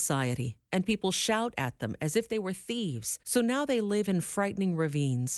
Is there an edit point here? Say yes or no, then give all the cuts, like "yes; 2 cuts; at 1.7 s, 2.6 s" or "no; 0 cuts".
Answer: yes; 1 cut; at 3.2 s